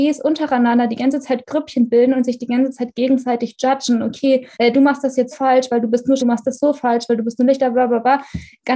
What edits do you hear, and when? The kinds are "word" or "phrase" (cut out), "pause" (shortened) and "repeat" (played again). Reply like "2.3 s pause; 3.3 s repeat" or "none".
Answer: 4.5 s pause; 5.3 s word; 6.2 s word